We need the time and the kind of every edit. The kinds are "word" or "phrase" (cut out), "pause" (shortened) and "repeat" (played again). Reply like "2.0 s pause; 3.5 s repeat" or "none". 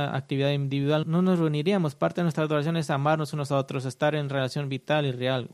1.0 s word